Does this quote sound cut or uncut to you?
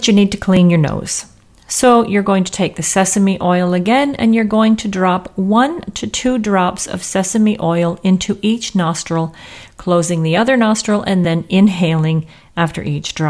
uncut